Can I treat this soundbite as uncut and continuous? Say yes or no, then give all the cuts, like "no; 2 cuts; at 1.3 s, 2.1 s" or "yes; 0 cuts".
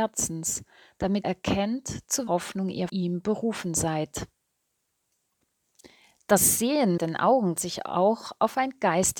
no; 5 cuts; at 1.2 s, 2.3 s, 2.9 s, 7.0 s, 7.6 s